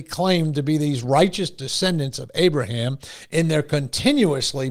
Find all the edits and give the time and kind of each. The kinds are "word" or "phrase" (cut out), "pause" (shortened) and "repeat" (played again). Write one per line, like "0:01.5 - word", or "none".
none